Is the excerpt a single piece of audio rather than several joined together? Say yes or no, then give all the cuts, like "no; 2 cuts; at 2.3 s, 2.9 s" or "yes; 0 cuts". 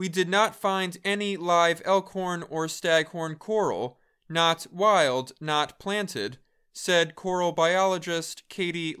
yes; 0 cuts